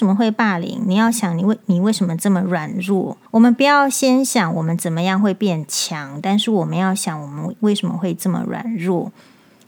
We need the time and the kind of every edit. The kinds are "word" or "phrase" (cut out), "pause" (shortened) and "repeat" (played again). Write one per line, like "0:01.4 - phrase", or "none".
0:03.3 - pause